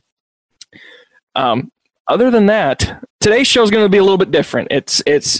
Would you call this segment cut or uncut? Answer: cut